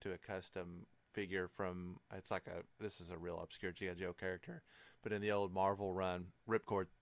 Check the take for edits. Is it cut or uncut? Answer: uncut